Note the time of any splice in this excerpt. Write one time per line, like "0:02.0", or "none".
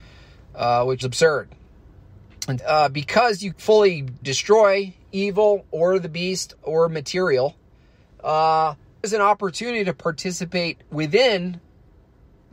0:01.0
0:02.6
0:03.5
0:04.2
0:06.5
0:09.0